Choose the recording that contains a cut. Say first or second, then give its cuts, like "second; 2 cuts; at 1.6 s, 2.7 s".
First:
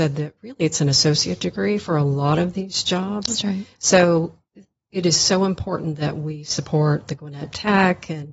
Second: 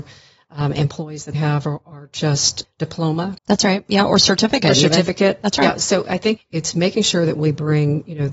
second; 4 cuts; at 1.3 s, 2.6 s, 3.4 s, 6.4 s